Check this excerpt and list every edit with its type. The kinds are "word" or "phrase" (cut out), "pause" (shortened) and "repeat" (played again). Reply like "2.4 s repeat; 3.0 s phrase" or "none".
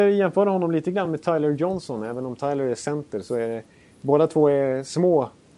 none